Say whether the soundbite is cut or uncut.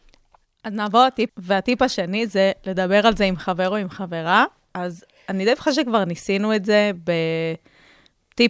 cut